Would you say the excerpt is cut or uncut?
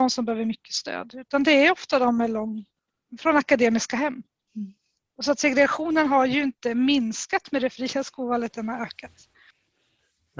uncut